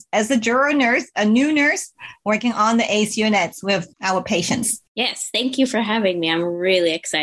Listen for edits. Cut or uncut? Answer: cut